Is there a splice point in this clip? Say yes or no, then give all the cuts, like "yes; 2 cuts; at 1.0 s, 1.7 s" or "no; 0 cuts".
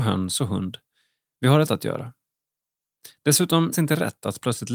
yes; 2 cuts; at 1.7 s, 3.7 s